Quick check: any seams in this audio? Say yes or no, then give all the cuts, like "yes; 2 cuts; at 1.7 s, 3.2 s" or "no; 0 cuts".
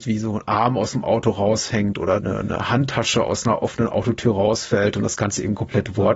yes; 1 cut; at 2.2 s